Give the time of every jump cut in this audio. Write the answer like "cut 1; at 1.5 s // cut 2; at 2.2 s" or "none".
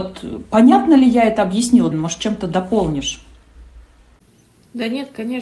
cut 1; at 1.9 s